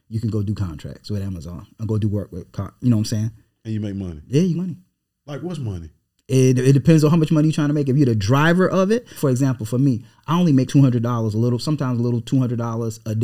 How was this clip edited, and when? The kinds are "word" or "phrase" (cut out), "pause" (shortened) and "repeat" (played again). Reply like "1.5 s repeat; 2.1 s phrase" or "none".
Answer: 4.5 s word; 9.2 s word; 10.7 s word